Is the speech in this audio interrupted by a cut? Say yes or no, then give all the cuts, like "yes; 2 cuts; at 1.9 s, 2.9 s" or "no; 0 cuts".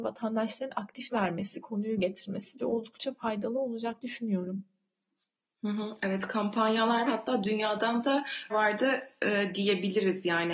yes; 6 cuts; at 1.1 s, 2.0 s, 2.6 s, 4.0 s, 7.1 s, 8.5 s